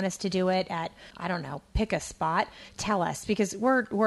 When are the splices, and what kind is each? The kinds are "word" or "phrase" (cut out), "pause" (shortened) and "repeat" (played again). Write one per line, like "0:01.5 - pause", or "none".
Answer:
0:01.1 - pause